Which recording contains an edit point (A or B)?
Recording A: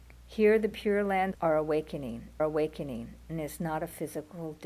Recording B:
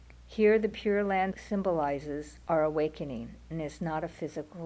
A